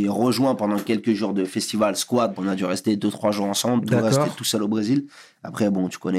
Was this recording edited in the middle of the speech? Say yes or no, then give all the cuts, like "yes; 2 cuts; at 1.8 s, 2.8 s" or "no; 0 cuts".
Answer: yes; 1 cut; at 2.4 s